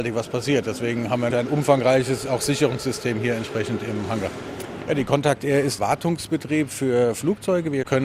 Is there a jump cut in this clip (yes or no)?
yes